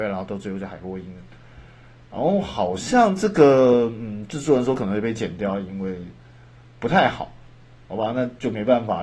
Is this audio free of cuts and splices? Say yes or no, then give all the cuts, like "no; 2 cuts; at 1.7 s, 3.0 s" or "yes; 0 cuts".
yes; 0 cuts